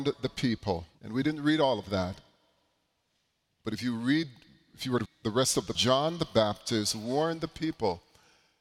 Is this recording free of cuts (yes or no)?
no